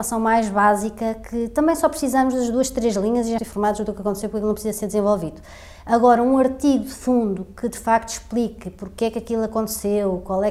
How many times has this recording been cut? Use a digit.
1